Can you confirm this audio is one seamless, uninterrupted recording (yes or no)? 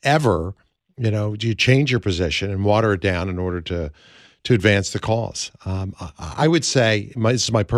yes